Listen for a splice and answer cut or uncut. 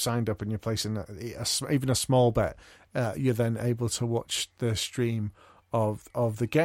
uncut